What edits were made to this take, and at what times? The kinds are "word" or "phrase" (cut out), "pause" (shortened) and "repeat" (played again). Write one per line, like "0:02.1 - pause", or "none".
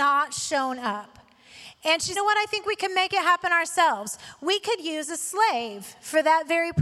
0:02.1 - phrase